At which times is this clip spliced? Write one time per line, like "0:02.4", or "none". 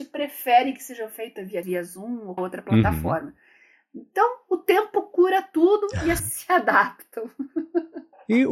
0:01.6
0:02.4
0:06.2